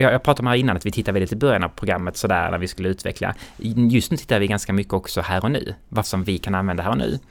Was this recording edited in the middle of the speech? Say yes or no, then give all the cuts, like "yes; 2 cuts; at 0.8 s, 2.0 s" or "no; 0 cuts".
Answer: yes; 2 cuts; at 1.3 s, 6.0 s